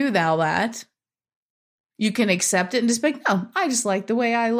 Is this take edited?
no; 0 cuts

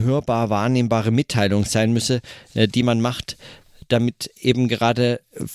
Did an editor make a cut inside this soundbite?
no; 0 cuts

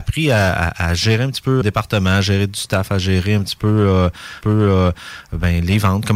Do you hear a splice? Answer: yes; 2 cuts; at 1.6 s, 4.4 s

